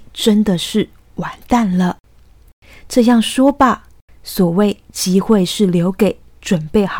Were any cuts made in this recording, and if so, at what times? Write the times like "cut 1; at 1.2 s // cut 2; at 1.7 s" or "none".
none